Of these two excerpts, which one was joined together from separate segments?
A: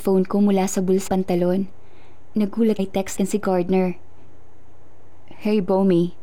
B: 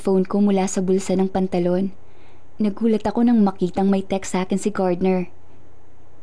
A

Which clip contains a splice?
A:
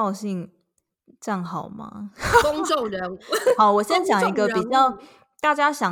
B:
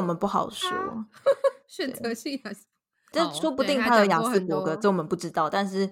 B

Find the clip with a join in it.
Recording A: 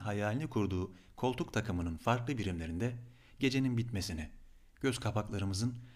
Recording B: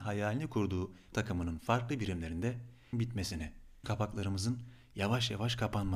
B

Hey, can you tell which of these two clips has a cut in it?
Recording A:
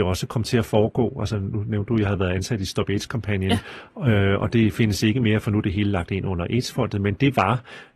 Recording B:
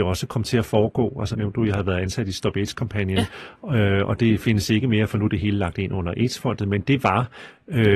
B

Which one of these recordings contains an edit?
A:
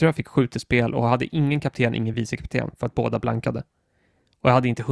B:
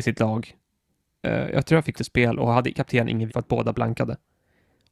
B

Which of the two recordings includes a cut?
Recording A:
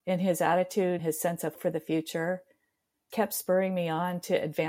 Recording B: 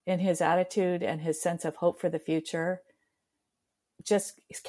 A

